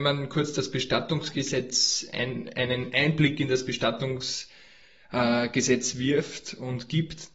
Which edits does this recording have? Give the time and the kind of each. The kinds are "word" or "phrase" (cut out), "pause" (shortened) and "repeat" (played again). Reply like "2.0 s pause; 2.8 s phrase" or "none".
none

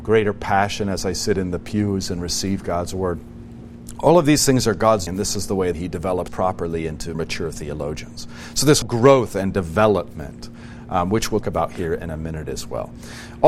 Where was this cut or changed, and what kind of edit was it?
5.1 s word; 5.7 s word; 6.3 s word; 7.1 s word; 8.8 s word; 11.4 s word

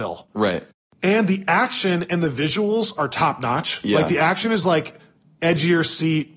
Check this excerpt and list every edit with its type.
none

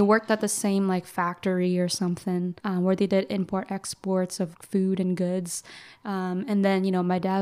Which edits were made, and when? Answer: 2.6 s pause; 4.5 s word

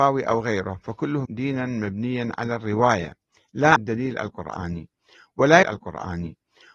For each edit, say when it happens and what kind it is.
1.2 s word; 3.8 s word; 5.6 s repeat

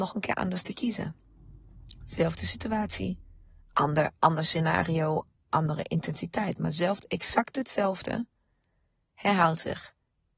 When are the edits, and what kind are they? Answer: none

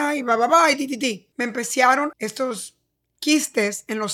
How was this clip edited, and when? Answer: 1.3 s pause; 2.1 s phrase

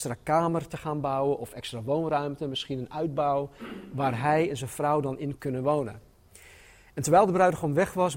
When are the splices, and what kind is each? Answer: 5.4 s word

